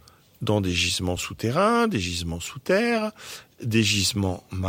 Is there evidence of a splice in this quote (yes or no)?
no